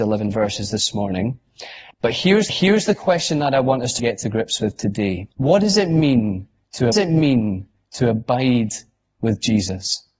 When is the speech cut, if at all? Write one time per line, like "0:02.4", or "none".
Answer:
0:01.9
0:02.5
0:04.0
0:05.3
0:06.9